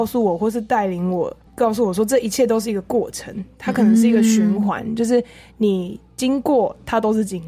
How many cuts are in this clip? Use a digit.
1